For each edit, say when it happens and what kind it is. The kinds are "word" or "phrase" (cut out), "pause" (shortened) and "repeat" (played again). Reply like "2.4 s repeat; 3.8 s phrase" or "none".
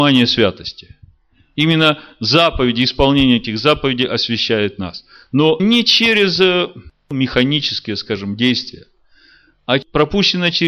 5.6 s phrase